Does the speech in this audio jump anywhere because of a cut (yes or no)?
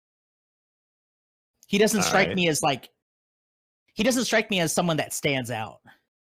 no